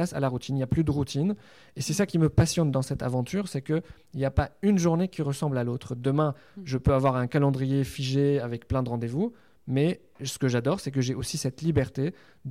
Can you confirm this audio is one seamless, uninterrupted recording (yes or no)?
yes